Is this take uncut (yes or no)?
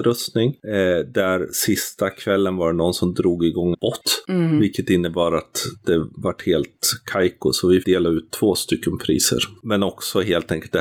no